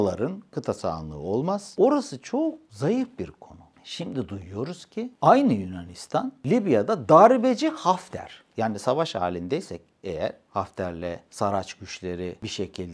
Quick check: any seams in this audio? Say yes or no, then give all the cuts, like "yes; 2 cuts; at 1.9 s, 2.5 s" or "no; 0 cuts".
yes; 1 cut; at 11.3 s